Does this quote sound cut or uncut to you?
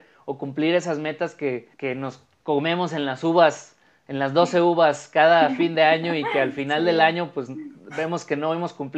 cut